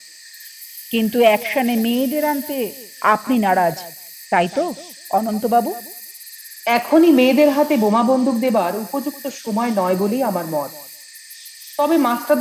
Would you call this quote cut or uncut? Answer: uncut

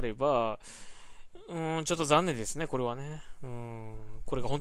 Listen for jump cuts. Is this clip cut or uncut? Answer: uncut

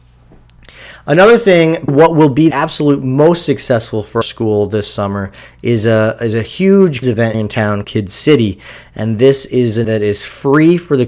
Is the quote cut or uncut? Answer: cut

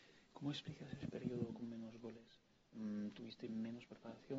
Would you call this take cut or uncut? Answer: uncut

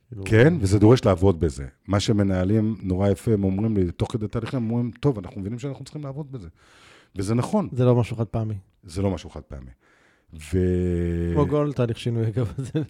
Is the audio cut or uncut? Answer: uncut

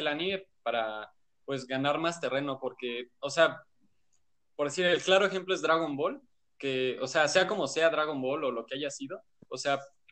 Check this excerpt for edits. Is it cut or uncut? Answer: uncut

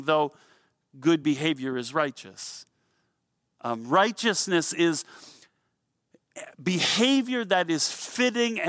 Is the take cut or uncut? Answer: uncut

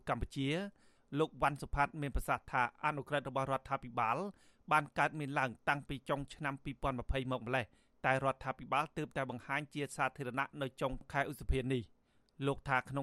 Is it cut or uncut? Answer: uncut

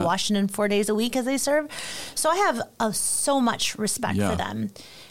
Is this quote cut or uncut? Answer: uncut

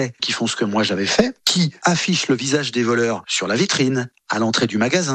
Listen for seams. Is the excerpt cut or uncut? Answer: uncut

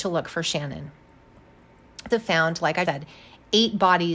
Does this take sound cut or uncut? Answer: cut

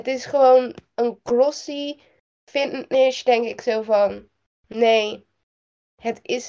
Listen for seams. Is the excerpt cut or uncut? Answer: uncut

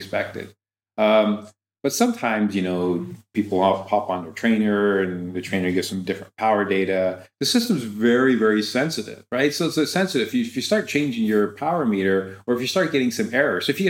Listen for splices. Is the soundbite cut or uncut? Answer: uncut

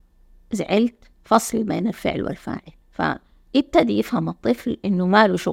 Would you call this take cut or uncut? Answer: cut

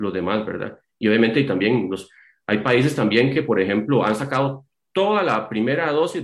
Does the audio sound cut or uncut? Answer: uncut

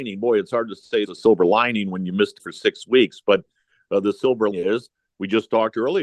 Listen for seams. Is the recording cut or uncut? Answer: cut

